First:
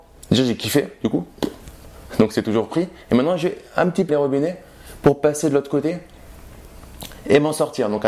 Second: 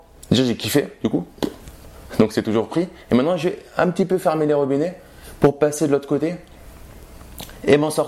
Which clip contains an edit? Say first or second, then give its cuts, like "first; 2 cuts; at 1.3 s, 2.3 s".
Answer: first; 1 cut; at 4.1 s